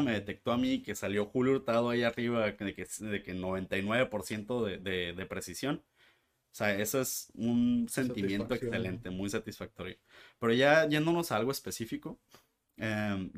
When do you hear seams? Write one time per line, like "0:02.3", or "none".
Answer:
none